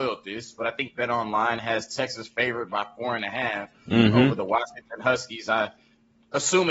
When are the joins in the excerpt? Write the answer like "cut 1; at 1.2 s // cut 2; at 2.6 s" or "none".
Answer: none